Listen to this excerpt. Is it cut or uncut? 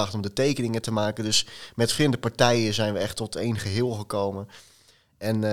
uncut